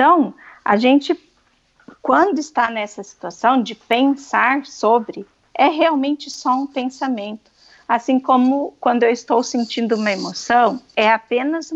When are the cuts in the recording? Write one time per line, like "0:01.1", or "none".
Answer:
none